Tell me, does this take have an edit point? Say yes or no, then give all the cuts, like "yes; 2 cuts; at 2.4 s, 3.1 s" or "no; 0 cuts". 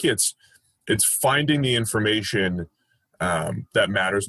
no; 0 cuts